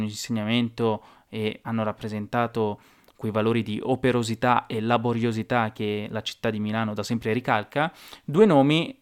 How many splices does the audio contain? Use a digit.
0